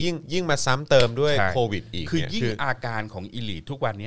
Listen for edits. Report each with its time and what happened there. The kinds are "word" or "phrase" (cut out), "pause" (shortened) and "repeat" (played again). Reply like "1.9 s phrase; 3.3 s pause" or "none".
none